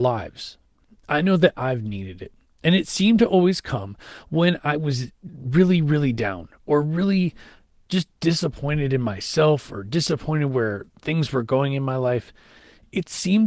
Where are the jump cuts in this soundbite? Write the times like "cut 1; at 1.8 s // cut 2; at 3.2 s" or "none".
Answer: cut 1; at 5.3 s

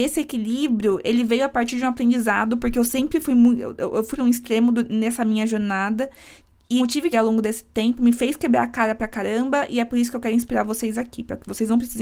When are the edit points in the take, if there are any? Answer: cut 1; at 4.1 s // cut 2; at 6.8 s // cut 3; at 7.1 s

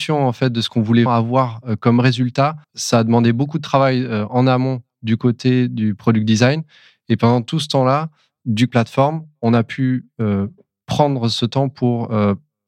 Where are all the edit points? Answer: cut 1; at 1.1 s // cut 2; at 2.6 s // cut 3; at 8.7 s

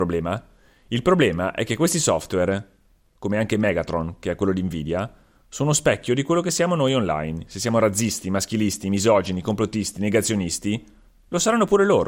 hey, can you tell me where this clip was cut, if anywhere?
none

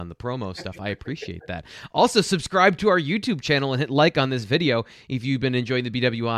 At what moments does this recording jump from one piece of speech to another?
none

